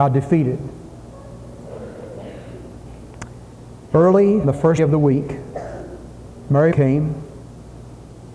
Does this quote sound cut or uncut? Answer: cut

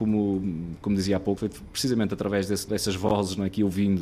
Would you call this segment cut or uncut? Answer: cut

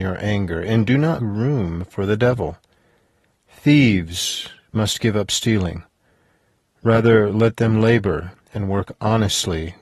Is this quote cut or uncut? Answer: cut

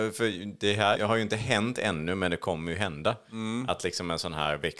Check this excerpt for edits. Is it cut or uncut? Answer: cut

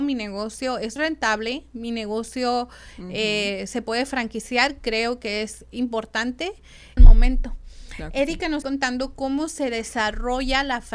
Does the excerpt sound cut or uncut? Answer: cut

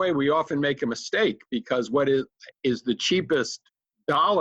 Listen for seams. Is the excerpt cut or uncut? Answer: uncut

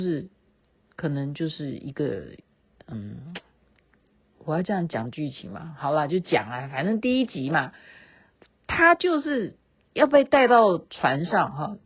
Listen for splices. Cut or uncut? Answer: uncut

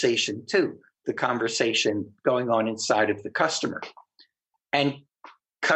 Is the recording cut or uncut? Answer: uncut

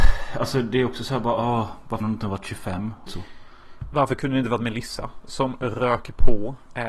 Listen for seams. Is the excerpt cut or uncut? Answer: cut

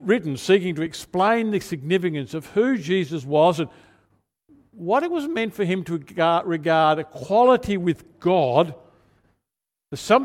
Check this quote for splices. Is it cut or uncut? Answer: uncut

